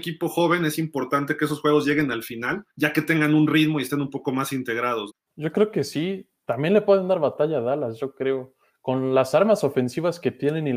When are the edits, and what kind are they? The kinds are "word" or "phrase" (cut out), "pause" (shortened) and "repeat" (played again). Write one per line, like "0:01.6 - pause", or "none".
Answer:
0:02.7 - pause